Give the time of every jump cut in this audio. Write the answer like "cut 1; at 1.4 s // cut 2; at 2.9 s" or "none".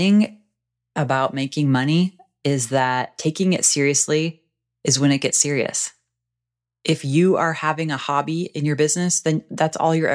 none